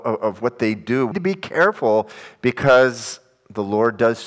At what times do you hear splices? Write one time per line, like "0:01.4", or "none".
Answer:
0:01.1